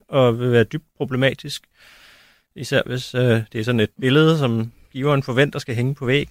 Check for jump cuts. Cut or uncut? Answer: uncut